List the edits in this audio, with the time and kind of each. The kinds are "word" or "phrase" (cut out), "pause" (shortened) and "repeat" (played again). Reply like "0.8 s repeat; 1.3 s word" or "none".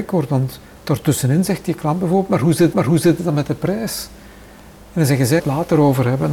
2.7 s repeat; 5.4 s phrase